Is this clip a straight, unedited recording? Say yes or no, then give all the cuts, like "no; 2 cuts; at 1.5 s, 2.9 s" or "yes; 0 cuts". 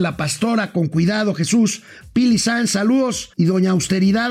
no; 1 cut; at 3.3 s